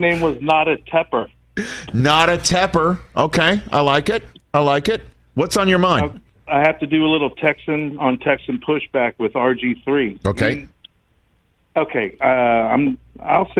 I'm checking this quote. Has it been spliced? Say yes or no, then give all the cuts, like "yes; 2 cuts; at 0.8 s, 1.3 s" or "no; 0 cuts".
yes; 1 cut; at 6.5 s